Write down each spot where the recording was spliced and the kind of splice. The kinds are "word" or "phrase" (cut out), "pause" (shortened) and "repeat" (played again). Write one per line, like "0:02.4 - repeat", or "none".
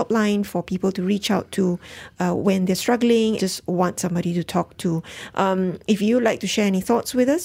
0:03.4 - word